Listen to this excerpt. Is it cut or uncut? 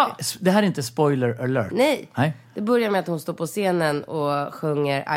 uncut